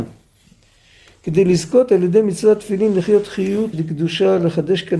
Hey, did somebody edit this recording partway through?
yes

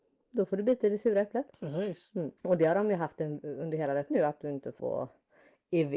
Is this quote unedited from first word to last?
no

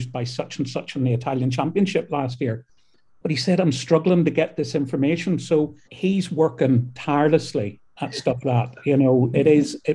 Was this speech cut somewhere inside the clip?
yes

